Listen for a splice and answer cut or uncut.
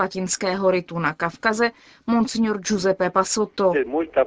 uncut